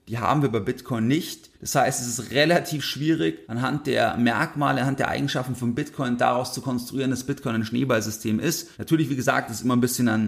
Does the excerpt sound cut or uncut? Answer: cut